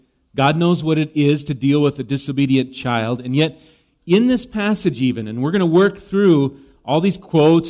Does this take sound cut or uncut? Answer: uncut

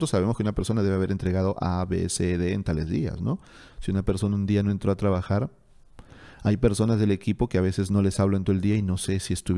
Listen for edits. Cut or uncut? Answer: uncut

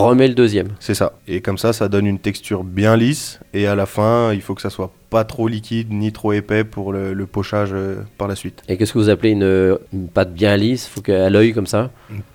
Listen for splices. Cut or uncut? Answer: cut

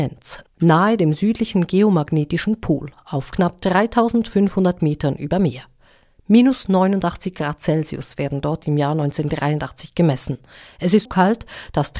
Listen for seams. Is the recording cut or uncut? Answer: cut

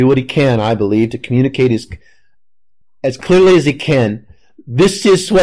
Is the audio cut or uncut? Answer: uncut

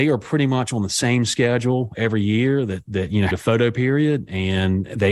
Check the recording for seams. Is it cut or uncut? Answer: cut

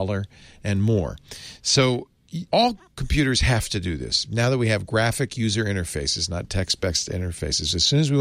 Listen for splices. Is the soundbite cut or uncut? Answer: cut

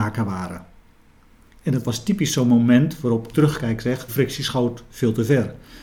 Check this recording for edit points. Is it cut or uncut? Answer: cut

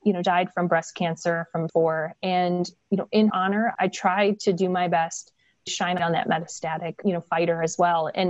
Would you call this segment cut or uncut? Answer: cut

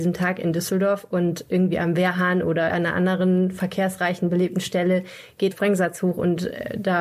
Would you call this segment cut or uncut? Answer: cut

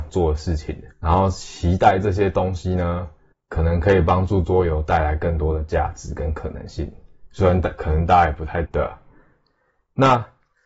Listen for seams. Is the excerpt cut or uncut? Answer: cut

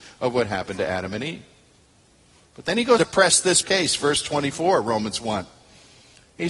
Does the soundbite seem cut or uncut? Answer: cut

